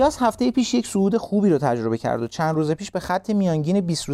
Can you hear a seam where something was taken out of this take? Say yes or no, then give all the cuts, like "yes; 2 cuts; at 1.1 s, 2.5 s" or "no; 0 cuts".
no; 0 cuts